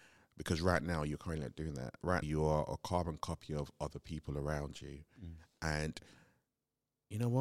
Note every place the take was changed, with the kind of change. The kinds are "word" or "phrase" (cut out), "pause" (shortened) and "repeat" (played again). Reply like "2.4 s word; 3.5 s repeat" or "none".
2.2 s word